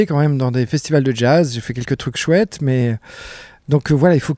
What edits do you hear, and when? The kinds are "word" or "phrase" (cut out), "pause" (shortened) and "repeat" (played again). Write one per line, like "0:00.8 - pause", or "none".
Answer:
none